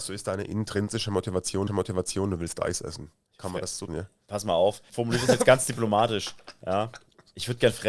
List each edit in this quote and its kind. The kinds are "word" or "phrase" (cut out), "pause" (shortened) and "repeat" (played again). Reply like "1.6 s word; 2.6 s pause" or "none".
1.7 s repeat; 3.9 s word; 4.9 s word